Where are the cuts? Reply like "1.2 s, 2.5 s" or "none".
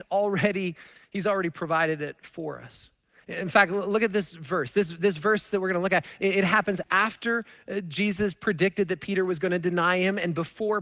6.8 s